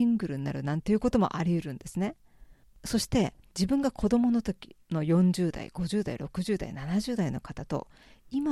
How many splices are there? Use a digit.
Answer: 2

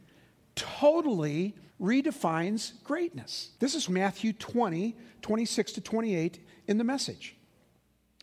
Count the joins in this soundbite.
3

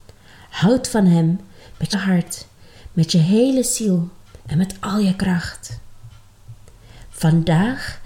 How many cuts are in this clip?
2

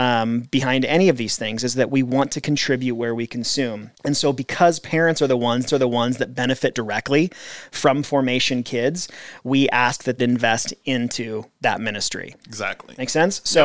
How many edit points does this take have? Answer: 4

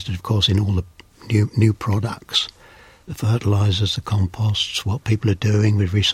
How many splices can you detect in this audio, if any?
0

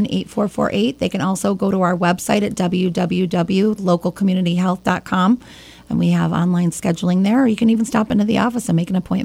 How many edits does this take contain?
0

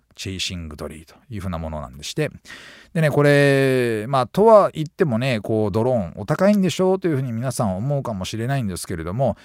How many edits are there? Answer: 0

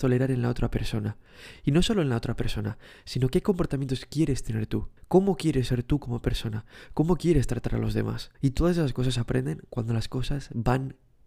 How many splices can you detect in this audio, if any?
2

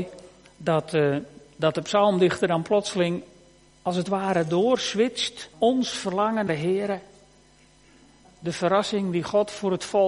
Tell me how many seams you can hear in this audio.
3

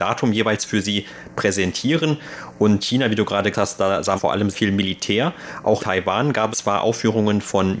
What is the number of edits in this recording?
6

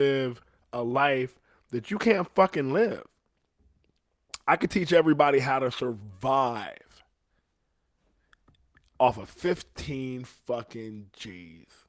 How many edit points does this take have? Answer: 0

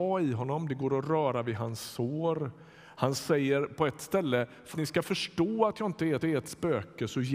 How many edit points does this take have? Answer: 2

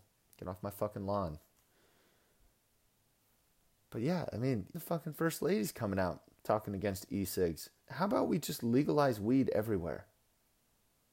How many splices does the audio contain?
2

